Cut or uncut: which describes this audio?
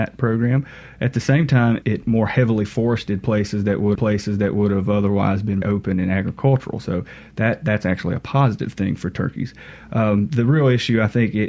cut